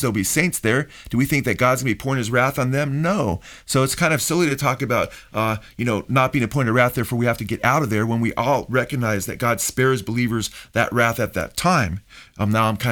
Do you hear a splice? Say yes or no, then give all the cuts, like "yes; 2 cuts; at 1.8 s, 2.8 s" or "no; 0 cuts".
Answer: no; 0 cuts